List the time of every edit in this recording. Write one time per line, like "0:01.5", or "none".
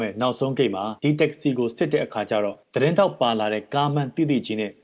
0:01.0
0:02.6